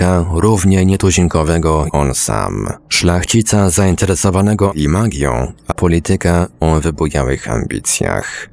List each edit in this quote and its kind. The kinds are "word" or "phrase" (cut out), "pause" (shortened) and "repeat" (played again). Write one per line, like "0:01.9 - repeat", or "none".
0:01.9 - word
0:02.8 - pause
0:04.7 - word
0:05.7 - word